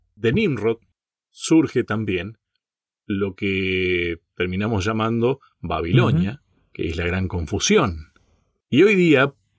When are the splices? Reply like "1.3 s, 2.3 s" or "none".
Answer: none